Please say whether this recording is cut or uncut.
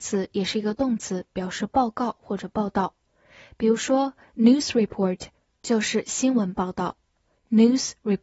uncut